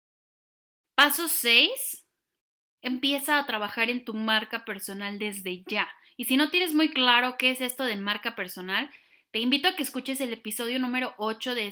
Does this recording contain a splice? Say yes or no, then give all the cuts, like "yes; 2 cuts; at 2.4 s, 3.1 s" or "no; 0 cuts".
no; 0 cuts